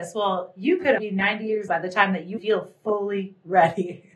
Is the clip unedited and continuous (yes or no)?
no